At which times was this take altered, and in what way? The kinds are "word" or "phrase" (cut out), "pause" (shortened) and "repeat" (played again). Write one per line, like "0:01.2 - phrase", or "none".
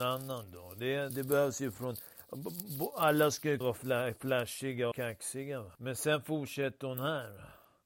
0:01.1 - word
0:03.6 - word
0:04.9 - word
0:05.7 - pause